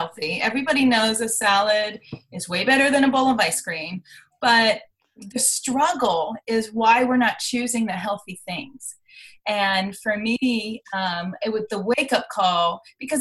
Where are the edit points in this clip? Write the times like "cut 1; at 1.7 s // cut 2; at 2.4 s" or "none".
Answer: none